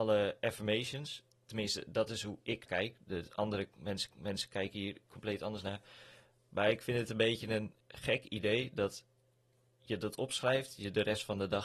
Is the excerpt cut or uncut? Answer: cut